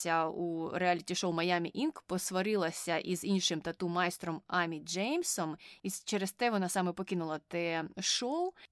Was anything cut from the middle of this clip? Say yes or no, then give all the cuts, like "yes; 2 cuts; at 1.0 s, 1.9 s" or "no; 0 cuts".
no; 0 cuts